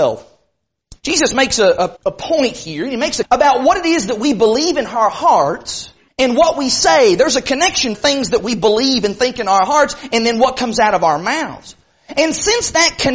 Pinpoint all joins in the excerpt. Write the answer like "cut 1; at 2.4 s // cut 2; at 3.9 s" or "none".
cut 1; at 1.0 s // cut 2; at 2.0 s // cut 3; at 3.2 s // cut 4; at 6.1 s // cut 5; at 7.9 s